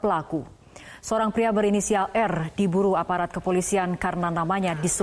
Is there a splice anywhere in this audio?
no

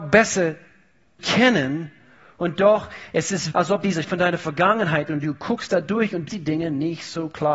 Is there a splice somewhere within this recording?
yes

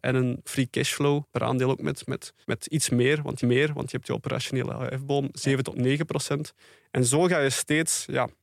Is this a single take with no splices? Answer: no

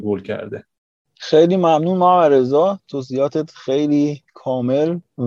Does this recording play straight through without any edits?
yes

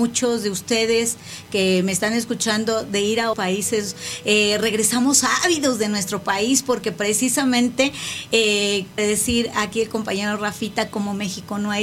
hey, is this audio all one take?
no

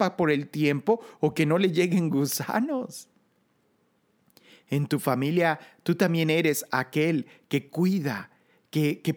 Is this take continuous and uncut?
yes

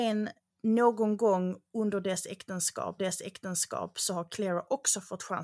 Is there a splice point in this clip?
yes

